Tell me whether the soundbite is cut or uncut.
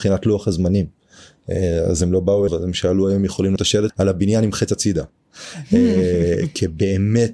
cut